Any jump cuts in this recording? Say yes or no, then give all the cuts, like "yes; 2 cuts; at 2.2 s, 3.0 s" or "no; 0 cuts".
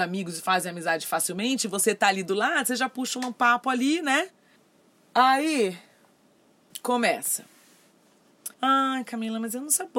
yes; 1 cut; at 8.5 s